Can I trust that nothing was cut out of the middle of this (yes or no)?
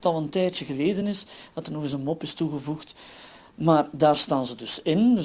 yes